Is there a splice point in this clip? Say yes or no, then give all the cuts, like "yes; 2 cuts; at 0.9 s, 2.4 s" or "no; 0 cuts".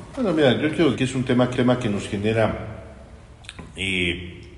yes; 2 cuts; at 0.9 s, 1.5 s